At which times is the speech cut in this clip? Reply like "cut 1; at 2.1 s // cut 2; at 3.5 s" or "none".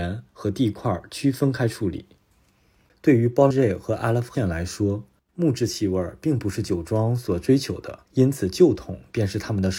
cut 1; at 3.5 s // cut 2; at 4.3 s // cut 3; at 5.2 s // cut 4; at 8.1 s